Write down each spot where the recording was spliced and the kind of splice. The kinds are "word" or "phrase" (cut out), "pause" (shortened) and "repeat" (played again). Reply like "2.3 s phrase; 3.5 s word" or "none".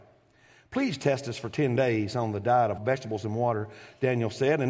2.8 s phrase